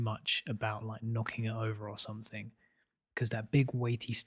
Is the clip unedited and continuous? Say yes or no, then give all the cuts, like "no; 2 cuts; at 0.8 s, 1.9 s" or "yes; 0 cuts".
yes; 0 cuts